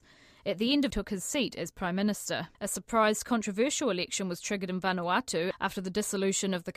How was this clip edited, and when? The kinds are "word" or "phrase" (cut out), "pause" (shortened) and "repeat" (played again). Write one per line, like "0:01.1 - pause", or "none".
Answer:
0:00.9 - phrase
0:02.5 - pause